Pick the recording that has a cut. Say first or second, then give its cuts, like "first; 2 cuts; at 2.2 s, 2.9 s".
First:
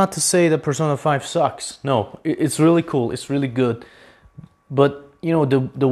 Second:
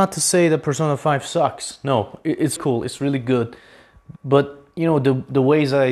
second; 2 cuts; at 2.6 s, 4.2 s